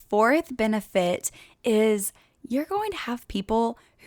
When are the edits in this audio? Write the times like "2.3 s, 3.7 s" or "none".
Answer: none